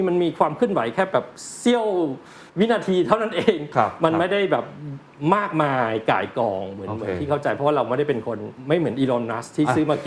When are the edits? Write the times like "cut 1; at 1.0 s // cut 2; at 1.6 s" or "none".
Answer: cut 1; at 2.5 s